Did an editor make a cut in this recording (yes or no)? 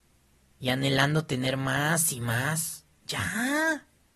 no